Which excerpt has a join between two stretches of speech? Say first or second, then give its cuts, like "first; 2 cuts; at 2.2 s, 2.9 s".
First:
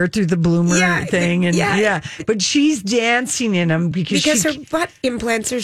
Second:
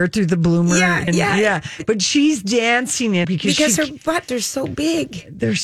second; 3 cuts; at 1.1 s, 3.2 s, 4.3 s